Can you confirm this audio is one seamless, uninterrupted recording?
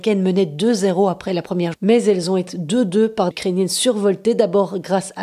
no; 3 cuts; at 1.7 s, 2.5 s, 3.3 s

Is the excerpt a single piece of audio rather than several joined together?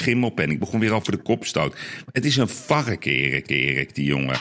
no; 1 cut; at 3.5 s

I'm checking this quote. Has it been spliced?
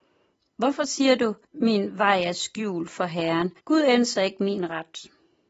yes; 2 cuts; at 1.4 s, 3.6 s

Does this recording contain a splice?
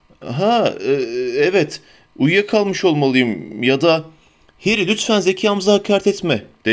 no; 0 cuts

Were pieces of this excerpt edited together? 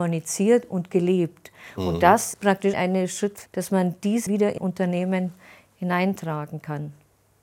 yes; 5 cuts; at 2.3 s, 2.7 s, 3.5 s, 4.3 s, 4.6 s

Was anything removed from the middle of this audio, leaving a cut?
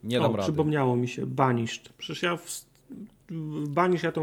yes; 1 cut; at 2.0 s

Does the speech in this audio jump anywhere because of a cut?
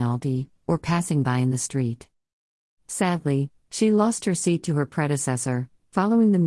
no; 0 cuts

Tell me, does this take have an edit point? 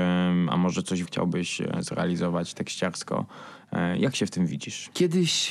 yes; 1 cut; at 1.1 s

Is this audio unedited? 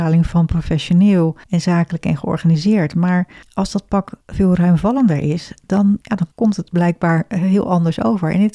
no; 5 cuts; at 1.4 s, 3.4 s, 4.2 s, 6.0 s, 6.3 s

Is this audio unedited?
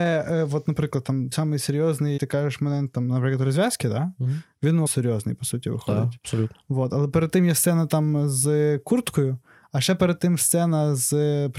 no; 3 cuts; at 1.3 s, 2.2 s, 4.9 s

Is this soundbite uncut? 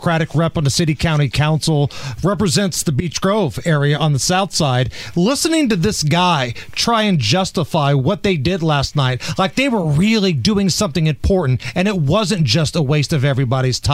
yes; 0 cuts

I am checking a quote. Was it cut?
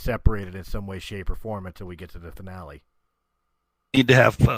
yes; 1 cut; at 3.0 s

